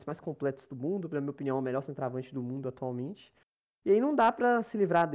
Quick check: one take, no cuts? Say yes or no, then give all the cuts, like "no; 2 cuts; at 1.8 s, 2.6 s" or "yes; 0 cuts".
yes; 0 cuts